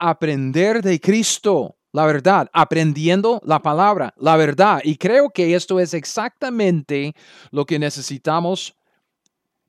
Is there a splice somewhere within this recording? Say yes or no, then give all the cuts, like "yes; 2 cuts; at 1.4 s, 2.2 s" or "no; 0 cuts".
no; 0 cuts